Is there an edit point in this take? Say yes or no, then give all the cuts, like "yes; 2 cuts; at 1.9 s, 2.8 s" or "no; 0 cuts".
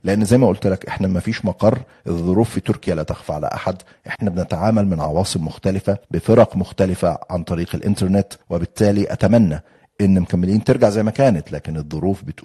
yes; 2 cuts; at 6.0 s, 8.4 s